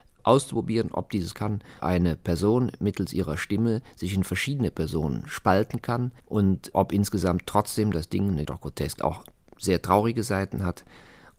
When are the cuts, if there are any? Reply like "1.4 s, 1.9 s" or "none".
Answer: 1.3 s, 1.8 s, 6.2 s, 8.4 s, 9.0 s